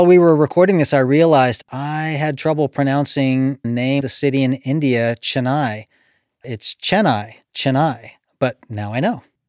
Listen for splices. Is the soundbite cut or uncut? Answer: cut